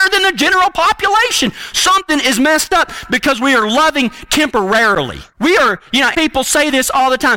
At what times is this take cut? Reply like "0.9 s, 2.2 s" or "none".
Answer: 6.1 s